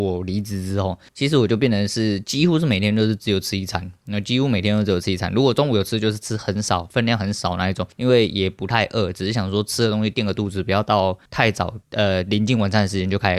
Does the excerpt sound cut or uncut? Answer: cut